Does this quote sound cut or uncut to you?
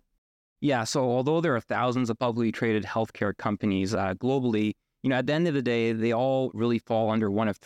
uncut